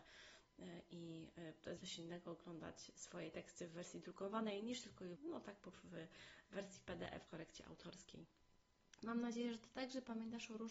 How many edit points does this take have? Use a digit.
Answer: 4